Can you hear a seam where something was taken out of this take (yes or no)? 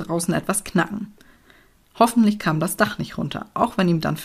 no